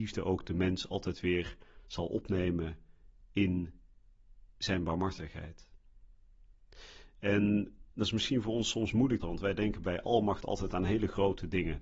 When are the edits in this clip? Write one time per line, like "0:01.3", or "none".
0:07.9
0:09.2